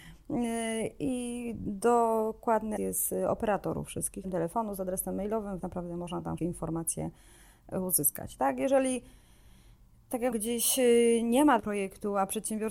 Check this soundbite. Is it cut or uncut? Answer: cut